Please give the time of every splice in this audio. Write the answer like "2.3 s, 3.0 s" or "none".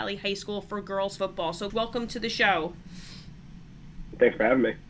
1.2 s, 1.7 s